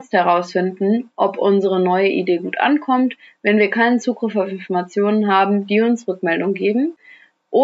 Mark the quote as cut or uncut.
uncut